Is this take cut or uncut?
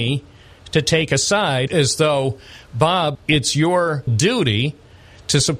cut